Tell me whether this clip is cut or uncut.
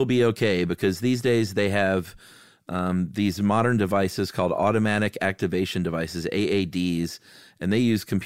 uncut